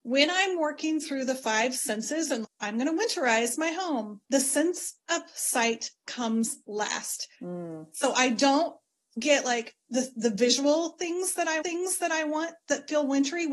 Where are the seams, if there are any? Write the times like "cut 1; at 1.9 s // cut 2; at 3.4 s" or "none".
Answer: cut 1; at 2.4 s // cut 2; at 4.2 s // cut 3; at 7.3 s // cut 4; at 11.6 s

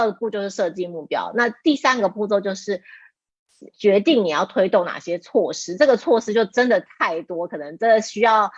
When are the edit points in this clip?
cut 1; at 3.7 s

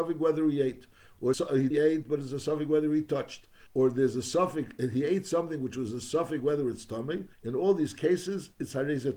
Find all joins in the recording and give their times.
cut 1; at 1.3 s // cut 2; at 1.7 s // cut 3; at 3.7 s // cut 4; at 7.3 s

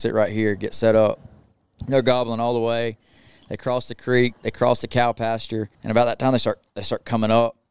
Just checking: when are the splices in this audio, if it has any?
cut 1; at 5.7 s

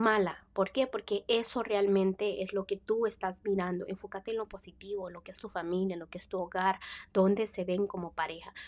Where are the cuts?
none

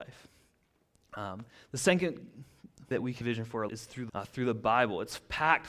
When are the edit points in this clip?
cut 1; at 2.9 s // cut 2; at 3.2 s // cut 3; at 3.7 s // cut 4; at 4.1 s

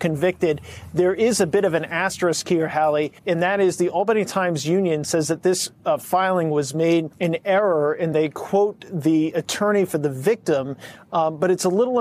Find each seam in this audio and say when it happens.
cut 1; at 3.2 s // cut 2; at 7.1 s

